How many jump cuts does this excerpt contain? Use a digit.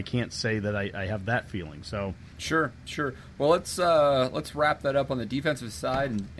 1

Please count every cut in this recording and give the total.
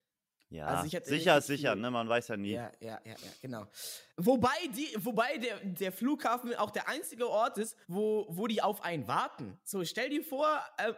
2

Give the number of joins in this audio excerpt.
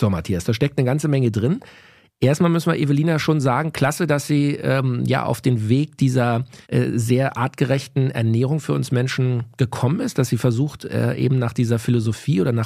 1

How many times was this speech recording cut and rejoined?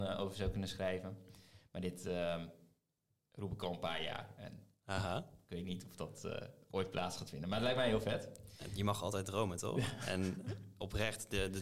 0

